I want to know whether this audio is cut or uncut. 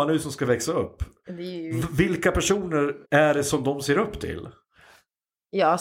cut